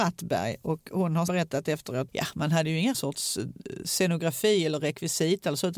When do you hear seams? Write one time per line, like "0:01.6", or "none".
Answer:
0:01.3
0:02.1
0:02.9